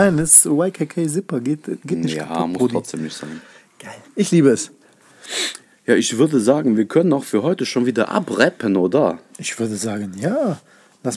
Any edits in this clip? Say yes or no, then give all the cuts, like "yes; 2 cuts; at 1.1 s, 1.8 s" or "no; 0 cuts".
yes; 1 cut; at 4.0 s